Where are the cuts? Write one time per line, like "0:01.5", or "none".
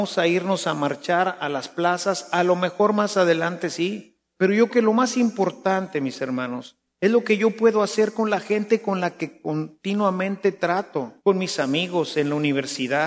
0:04.7
0:11.2